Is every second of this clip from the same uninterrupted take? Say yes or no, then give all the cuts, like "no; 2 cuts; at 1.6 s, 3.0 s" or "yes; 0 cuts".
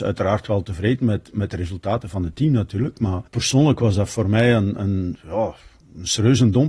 no; 1 cut; at 3.3 s